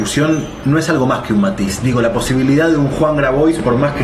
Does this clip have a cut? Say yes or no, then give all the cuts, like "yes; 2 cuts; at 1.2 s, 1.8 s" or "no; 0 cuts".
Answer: no; 0 cuts